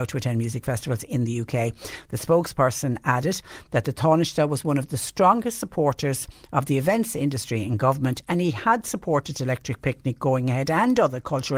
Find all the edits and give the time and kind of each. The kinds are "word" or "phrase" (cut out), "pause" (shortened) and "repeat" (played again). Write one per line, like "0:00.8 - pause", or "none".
none